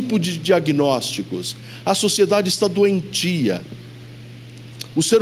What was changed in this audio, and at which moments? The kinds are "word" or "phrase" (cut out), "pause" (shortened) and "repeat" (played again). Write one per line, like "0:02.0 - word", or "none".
none